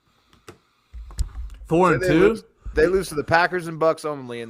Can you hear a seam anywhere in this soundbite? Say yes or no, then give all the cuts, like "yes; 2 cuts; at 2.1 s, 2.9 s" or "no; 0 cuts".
yes; 1 cut; at 2.7 s